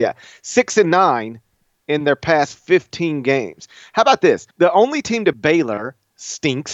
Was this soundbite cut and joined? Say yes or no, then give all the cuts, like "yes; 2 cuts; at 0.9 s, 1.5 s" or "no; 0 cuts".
yes; 2 cuts; at 4.5 s, 5.3 s